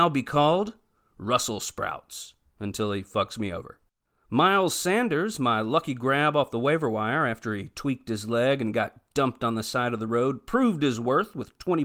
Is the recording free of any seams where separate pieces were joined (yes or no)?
yes